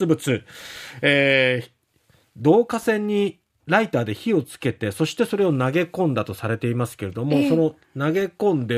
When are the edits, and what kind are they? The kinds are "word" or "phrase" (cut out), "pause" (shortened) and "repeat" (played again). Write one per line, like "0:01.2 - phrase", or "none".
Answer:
none